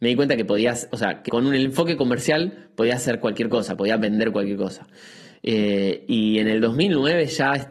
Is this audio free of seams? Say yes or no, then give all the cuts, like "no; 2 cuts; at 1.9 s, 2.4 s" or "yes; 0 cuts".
no; 1 cut; at 1.3 s